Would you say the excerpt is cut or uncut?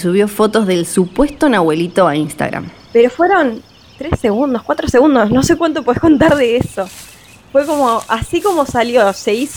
uncut